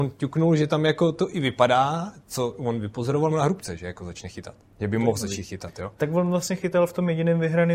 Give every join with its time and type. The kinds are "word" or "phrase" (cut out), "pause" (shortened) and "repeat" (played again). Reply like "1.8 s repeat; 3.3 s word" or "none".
3.3 s word; 4.6 s pause